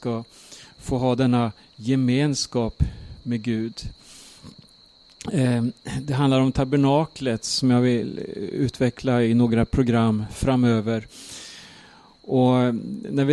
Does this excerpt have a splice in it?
no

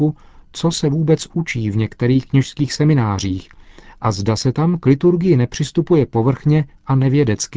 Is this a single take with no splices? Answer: yes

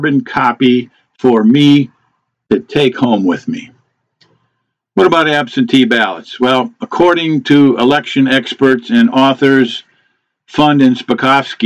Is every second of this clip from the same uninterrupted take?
yes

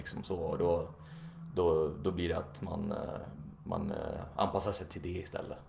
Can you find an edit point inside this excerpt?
no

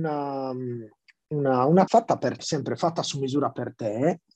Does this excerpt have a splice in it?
yes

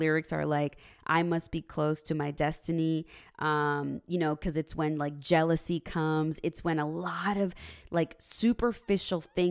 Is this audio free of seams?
yes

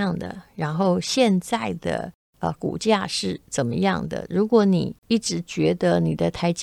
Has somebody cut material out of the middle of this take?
yes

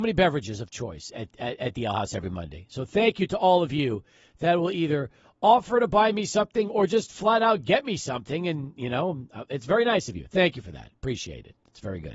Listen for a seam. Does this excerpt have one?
no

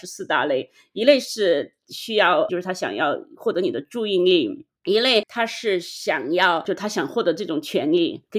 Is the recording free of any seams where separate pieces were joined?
no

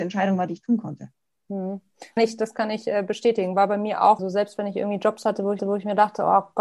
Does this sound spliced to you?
yes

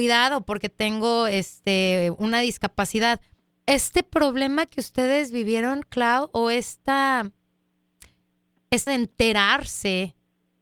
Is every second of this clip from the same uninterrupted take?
no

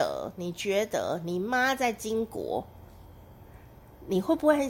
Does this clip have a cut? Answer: no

